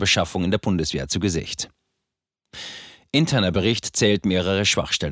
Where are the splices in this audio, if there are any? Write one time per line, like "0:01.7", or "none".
none